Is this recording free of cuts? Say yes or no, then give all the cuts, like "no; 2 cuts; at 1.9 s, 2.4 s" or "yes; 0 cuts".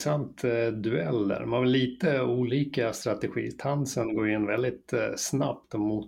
yes; 0 cuts